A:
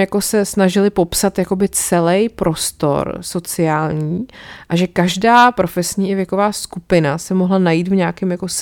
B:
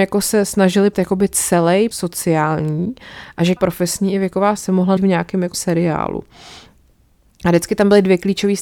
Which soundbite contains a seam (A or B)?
B